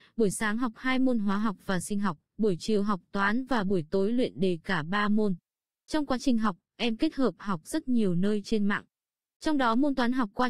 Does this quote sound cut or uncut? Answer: uncut